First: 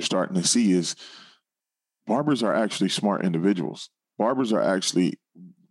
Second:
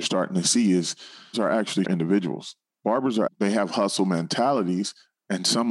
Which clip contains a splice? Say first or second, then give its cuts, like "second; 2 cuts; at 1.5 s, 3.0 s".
second; 3 cuts; at 1.3 s, 1.8 s, 3.3 s